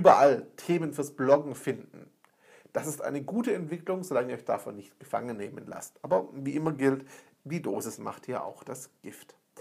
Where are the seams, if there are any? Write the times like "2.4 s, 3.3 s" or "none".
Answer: none